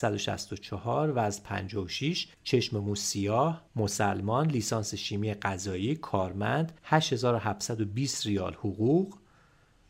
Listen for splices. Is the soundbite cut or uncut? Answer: cut